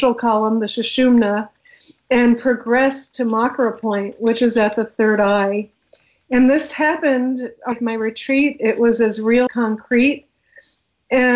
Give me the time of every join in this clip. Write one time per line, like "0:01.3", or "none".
0:07.7
0:09.5